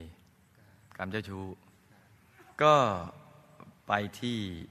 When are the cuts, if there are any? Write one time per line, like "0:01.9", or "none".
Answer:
0:02.5